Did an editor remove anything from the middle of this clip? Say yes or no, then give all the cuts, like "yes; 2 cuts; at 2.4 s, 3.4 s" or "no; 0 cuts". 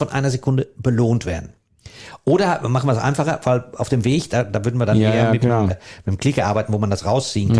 yes; 1 cut; at 5.7 s